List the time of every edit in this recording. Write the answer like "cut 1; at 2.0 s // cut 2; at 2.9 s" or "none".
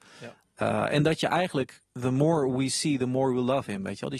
cut 1; at 1.8 s